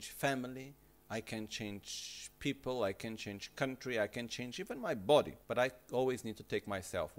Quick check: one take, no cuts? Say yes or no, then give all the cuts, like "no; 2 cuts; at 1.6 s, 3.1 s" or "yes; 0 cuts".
no; 1 cut; at 5.4 s